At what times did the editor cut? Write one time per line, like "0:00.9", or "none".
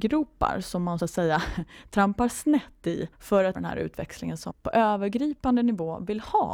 0:01.0
0:03.1
0:03.5
0:04.5